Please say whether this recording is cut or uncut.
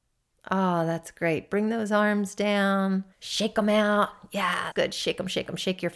cut